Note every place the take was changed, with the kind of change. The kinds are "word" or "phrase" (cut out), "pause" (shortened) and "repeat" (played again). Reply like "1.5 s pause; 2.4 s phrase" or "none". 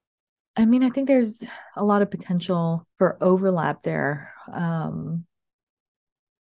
1.7 s pause; 2.9 s pause